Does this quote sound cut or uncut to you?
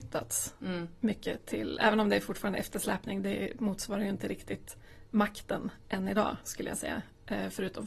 uncut